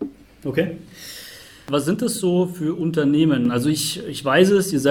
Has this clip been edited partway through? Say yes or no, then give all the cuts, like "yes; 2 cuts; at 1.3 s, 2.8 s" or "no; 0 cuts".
no; 0 cuts